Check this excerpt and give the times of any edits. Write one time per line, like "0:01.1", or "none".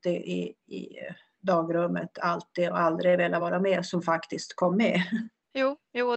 none